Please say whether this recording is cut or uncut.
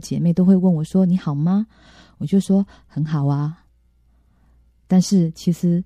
uncut